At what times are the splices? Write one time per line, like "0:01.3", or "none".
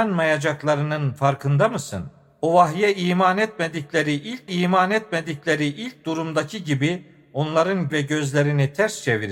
0:04.5
0:07.9